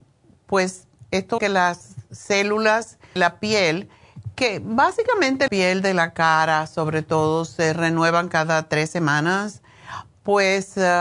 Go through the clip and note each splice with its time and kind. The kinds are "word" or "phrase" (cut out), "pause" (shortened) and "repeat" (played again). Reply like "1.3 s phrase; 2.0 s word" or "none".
1.4 s word; 3.2 s word; 5.5 s phrase